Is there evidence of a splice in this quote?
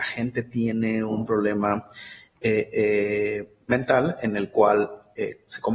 no; 0 cuts

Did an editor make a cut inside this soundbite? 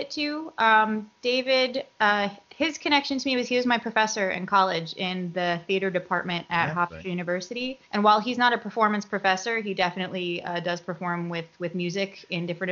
yes; 1 cut; at 7.8 s

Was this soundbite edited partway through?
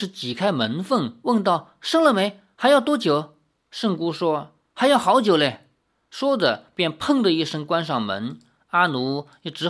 no; 0 cuts

